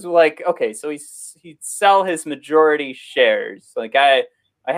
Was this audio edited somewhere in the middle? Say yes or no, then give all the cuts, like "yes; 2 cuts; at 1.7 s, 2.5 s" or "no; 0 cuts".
no; 0 cuts